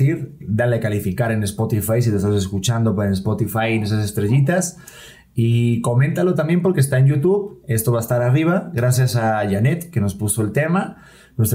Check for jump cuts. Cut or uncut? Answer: uncut